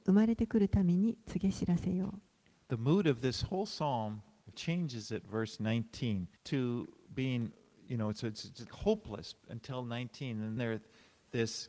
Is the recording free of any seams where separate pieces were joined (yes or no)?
no